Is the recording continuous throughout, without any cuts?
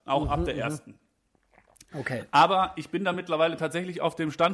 yes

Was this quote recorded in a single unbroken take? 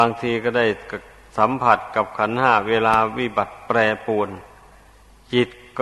yes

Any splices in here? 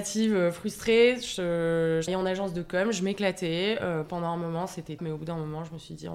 yes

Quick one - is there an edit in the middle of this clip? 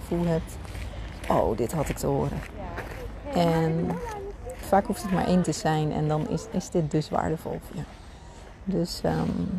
yes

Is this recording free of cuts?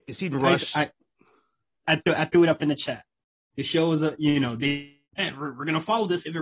no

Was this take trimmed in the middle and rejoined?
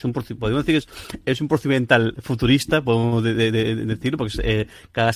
no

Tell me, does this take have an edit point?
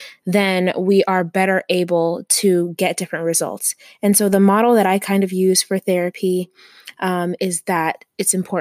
no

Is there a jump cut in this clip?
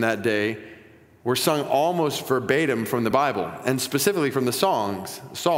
no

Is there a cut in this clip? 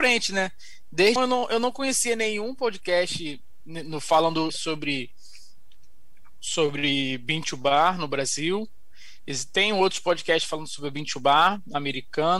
yes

